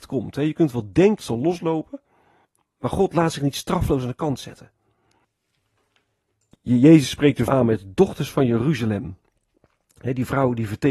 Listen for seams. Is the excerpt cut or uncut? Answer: cut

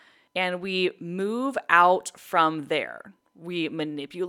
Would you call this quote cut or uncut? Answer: uncut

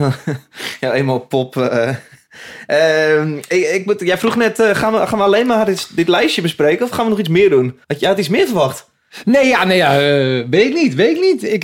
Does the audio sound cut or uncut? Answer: cut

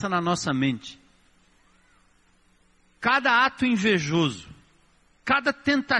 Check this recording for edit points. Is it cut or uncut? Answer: uncut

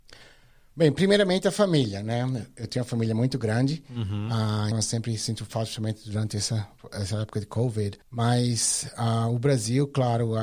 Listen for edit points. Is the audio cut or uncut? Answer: cut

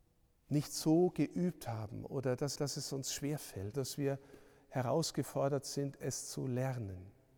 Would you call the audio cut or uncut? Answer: cut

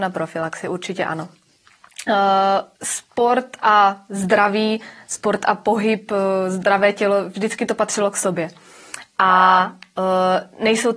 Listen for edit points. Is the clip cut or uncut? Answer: cut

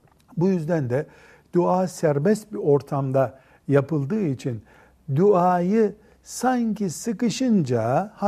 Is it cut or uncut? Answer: uncut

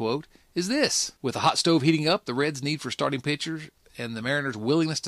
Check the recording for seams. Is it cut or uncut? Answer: cut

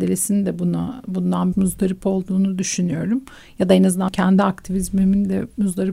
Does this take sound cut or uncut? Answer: cut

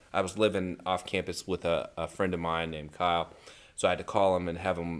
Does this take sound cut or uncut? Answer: uncut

